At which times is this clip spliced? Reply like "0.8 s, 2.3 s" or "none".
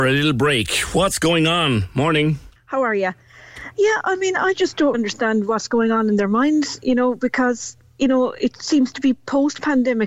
2.6 s, 4.9 s